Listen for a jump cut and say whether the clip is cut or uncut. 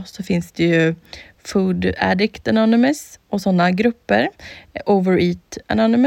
uncut